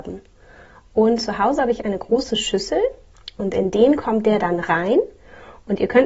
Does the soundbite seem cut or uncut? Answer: uncut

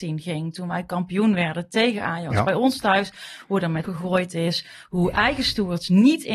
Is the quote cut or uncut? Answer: cut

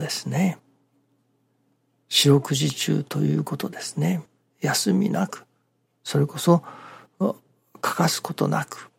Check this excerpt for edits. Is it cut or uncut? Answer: uncut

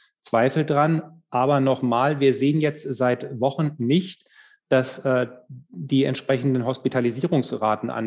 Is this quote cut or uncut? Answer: uncut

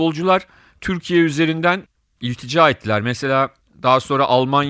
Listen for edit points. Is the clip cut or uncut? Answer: uncut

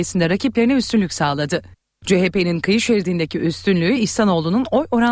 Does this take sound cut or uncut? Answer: uncut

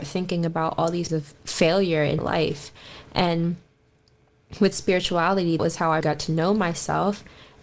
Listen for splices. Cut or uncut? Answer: cut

